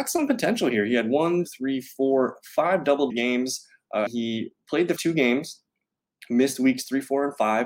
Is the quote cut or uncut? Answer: cut